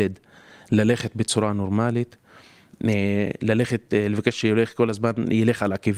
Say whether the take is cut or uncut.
uncut